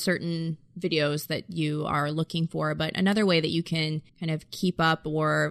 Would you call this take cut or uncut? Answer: cut